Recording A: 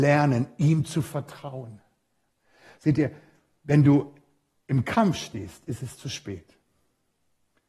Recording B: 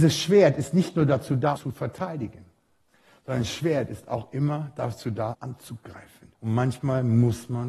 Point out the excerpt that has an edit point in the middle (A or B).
B